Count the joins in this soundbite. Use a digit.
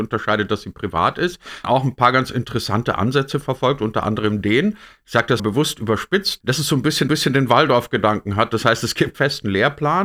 5